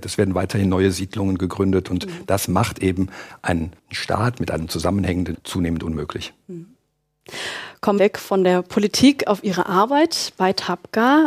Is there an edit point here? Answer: yes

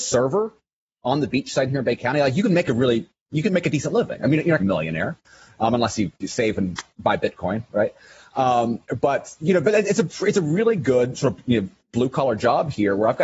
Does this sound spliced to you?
yes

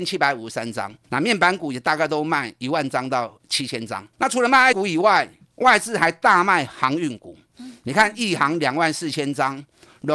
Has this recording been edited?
yes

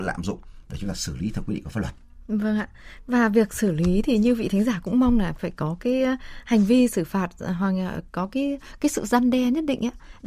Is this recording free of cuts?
yes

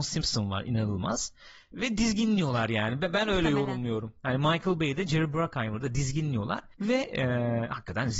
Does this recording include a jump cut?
yes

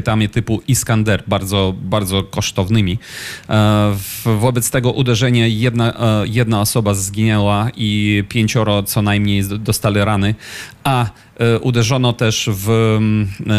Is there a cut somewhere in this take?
no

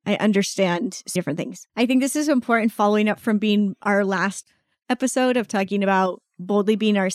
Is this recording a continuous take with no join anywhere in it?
no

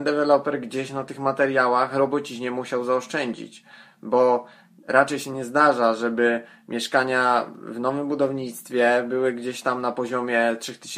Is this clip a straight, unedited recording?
yes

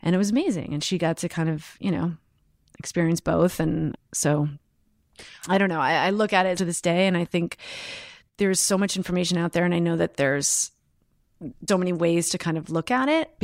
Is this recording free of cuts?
no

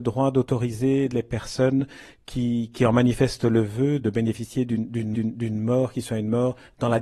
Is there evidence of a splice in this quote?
yes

